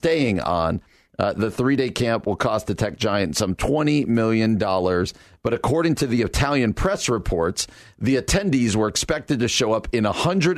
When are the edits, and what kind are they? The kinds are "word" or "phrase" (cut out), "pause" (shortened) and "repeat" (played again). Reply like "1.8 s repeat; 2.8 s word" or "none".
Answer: none